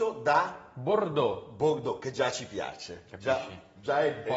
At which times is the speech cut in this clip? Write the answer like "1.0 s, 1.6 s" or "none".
none